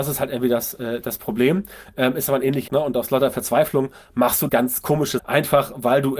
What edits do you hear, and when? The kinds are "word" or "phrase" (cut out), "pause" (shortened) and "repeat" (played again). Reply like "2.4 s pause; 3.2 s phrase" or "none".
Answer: 2.7 s word; 4.5 s word; 5.2 s word